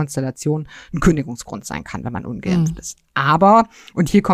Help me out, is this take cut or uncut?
uncut